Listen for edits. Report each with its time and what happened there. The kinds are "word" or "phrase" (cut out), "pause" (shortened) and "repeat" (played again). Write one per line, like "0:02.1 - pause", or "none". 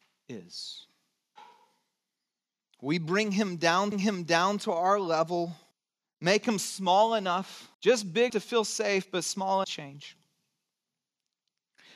0:03.9 - repeat
0:05.7 - pause
0:07.7 - pause
0:08.3 - word
0:09.6 - phrase